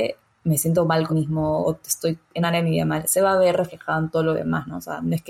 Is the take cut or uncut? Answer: cut